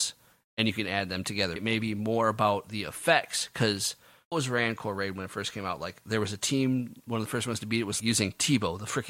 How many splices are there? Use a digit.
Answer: 3